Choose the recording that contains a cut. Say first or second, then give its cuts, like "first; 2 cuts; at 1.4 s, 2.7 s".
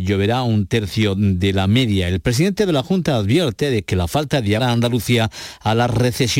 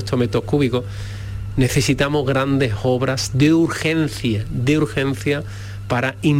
first; 1 cut; at 4.6 s